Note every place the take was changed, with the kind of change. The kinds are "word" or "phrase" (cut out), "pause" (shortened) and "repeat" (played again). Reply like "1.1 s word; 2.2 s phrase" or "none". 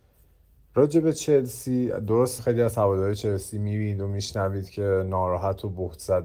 2.4 s word